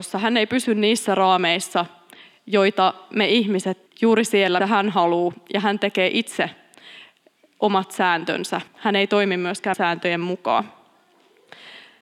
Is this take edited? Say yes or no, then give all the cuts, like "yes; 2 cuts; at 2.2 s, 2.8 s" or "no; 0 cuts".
yes; 4 cuts; at 3.9 s, 4.6 s, 8.7 s, 9.7 s